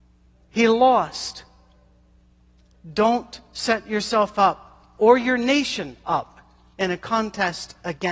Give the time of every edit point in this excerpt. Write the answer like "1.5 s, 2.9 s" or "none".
none